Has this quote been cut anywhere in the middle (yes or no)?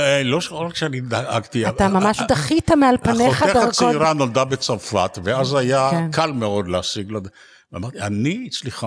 no